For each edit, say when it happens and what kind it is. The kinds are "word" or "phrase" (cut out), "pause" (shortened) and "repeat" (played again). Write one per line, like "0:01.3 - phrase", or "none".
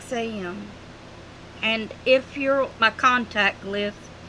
0:02.8 - word